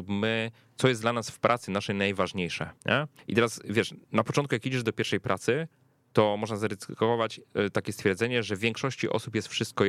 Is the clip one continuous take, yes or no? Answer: no